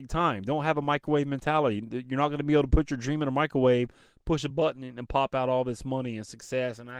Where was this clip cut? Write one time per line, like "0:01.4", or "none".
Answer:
none

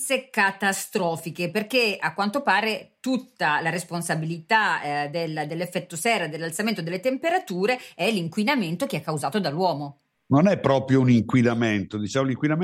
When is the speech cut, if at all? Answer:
none

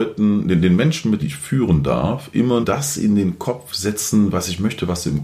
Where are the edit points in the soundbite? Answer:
0:01.2
0:02.6

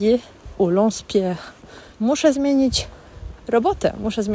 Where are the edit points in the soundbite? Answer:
0:01.9

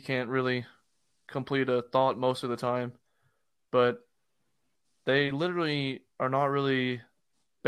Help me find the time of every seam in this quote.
none

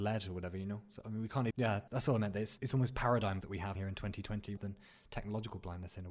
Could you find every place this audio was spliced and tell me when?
0:01.5
0:01.9
0:02.6
0:03.4
0:03.7
0:04.6

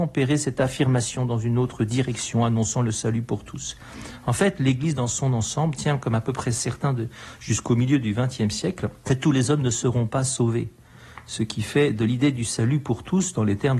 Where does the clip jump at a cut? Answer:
none

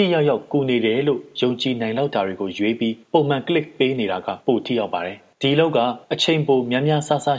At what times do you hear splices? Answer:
0:03.0
0:04.4
0:06.0

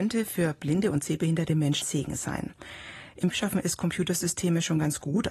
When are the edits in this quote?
0:01.8
0:03.3

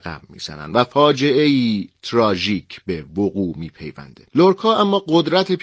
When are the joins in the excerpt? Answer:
0:04.3

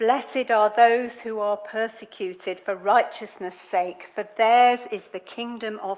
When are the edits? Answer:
none

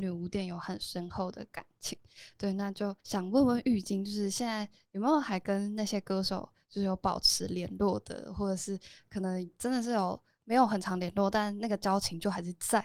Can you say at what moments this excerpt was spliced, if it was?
0:03.0

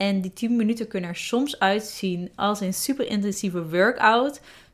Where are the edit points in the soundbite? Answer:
none

